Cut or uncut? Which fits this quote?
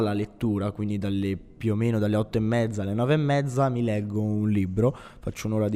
uncut